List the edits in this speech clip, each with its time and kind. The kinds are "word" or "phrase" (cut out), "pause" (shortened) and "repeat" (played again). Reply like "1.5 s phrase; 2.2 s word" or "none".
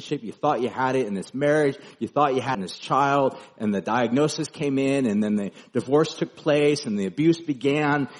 2.5 s word